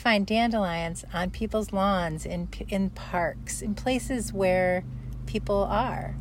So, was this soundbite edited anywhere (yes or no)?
no